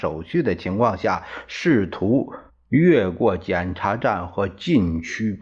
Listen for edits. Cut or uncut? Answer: cut